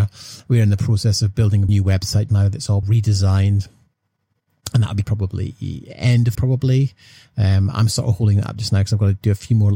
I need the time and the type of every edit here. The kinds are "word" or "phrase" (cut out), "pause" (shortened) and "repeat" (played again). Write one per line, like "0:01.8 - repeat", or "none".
0:01.7 - word
0:02.3 - word
0:02.8 - phrase
0:05.0 - phrase
0:06.3 - word